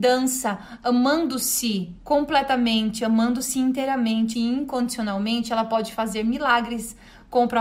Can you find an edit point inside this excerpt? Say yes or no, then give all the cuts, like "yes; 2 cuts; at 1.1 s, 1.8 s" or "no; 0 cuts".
yes; 2 cuts; at 2.0 s, 4.3 s